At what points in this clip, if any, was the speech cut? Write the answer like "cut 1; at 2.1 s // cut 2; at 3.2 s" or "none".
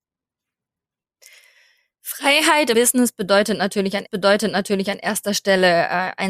cut 1; at 2.7 s // cut 2; at 4.1 s

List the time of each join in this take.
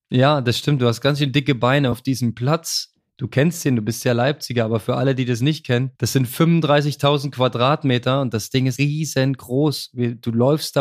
cut 1; at 1.9 s // cut 2; at 6.0 s // cut 3; at 8.8 s

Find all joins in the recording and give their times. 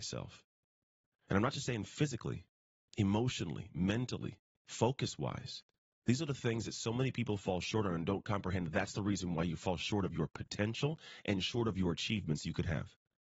cut 1; at 5.8 s

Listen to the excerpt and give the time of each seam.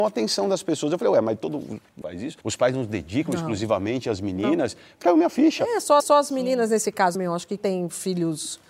cut 1; at 2.0 s // cut 2; at 2.4 s // cut 3; at 5.0 s // cut 4; at 6.0 s // cut 5; at 7.1 s // cut 6; at 7.6 s

